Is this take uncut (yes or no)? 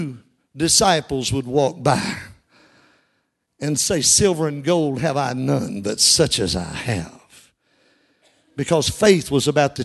yes